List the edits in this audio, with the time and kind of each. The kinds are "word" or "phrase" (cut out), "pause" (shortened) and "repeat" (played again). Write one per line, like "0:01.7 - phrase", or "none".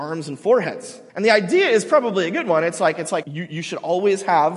0:01.1 - pause
0:03.2 - word